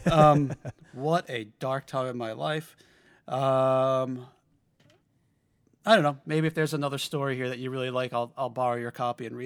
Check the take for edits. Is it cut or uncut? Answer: uncut